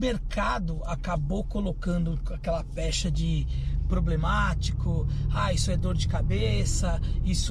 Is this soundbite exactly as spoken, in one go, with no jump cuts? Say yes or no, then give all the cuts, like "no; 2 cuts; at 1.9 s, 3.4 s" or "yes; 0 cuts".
yes; 0 cuts